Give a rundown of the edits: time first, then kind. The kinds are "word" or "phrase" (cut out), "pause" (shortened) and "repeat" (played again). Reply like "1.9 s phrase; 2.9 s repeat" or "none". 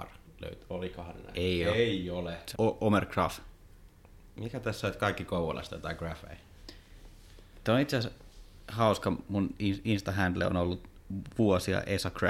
2.5 s word